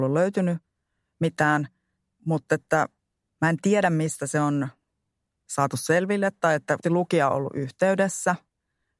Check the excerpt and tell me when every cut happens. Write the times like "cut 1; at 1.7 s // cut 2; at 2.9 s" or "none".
cut 1; at 6.8 s